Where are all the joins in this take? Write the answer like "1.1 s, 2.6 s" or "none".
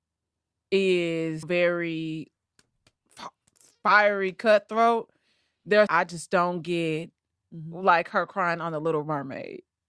1.4 s, 5.9 s